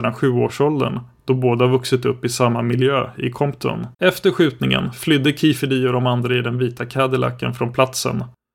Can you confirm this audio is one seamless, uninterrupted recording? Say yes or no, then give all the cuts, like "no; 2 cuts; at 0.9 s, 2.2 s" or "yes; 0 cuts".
no; 1 cut; at 3.9 s